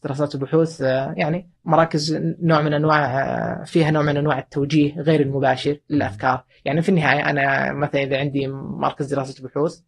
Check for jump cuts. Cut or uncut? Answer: cut